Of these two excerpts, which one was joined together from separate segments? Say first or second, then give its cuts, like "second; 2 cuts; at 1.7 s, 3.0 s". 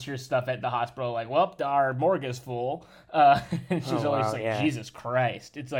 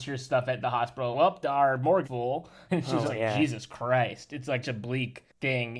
second; 5 cuts; at 1.1 s, 2.0 s, 2.7 s, 3.0 s, 4.6 s